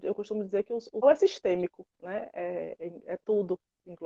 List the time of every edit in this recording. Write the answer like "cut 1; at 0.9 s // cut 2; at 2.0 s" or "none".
cut 1; at 1.0 s // cut 2; at 1.9 s